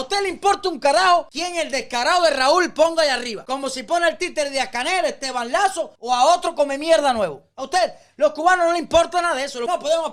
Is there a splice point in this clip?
no; 0 cuts

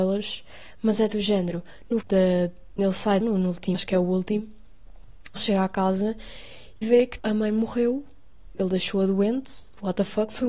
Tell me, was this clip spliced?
yes; 8 cuts; at 2.0 s, 2.8 s, 3.2 s, 3.7 s, 5.4 s, 6.8 s, 7.2 s, 8.5 s

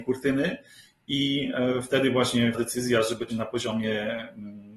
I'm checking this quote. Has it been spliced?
yes; 2 cuts; at 2.5 s, 3.3 s

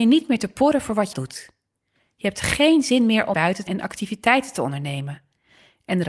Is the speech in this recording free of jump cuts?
no; 3 cuts; at 1.1 s, 3.3 s, 3.7 s

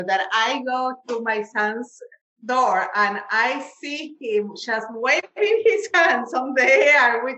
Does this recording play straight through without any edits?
yes; 0 cuts

